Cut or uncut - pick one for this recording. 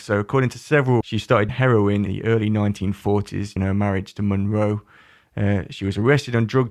cut